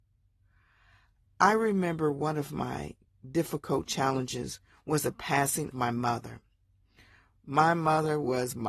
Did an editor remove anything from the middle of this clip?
yes; 2 cuts; at 3.1 s, 5.7 s

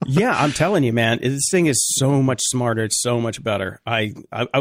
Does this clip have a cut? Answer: no; 0 cuts

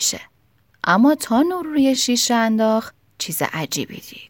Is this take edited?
no; 0 cuts

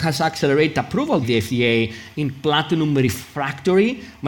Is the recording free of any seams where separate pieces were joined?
no; 1 cut; at 1.2 s

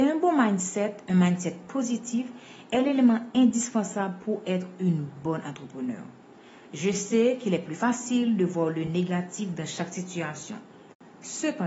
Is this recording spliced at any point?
no; 0 cuts

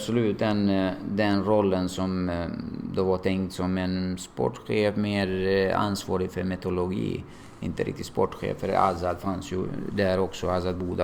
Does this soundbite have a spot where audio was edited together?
no; 0 cuts

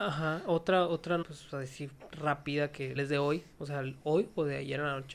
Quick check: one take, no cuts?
no; 2 cuts; at 1.2 s, 3.0 s

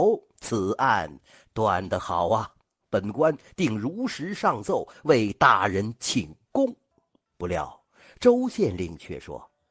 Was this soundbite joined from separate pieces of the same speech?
no; 0 cuts

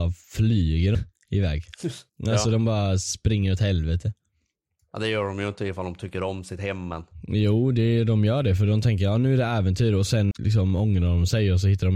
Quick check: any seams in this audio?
yes; 3 cuts; at 0.9 s, 2.1 s, 10.3 s

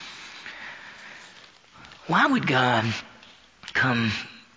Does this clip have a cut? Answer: no; 0 cuts

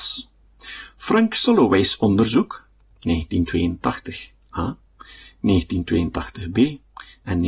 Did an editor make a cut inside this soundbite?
no; 0 cuts

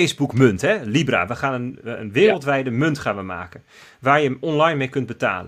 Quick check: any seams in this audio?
no; 0 cuts

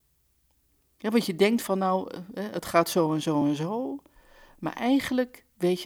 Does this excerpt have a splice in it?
no; 0 cuts

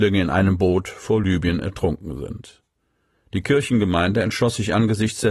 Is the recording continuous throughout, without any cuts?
yes; 0 cuts

